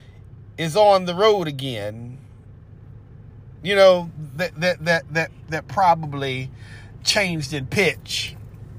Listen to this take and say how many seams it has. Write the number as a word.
one